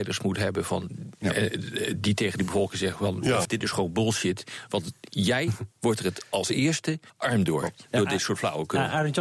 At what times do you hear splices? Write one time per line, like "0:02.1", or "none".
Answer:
0:03.4
0:07.1